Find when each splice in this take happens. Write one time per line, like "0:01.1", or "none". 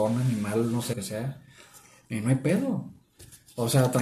0:00.9